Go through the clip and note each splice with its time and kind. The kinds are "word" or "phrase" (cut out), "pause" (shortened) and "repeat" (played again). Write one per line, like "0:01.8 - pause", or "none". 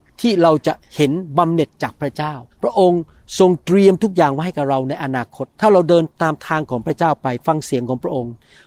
0:02.5 - pause
0:05.5 - pause